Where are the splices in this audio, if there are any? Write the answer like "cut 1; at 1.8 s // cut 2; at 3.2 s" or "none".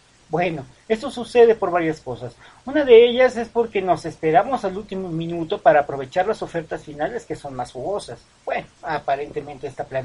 cut 1; at 8.7 s